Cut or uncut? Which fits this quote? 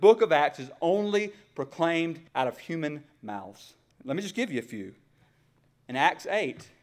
cut